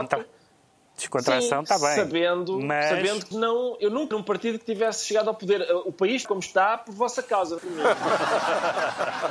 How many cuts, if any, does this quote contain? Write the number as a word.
four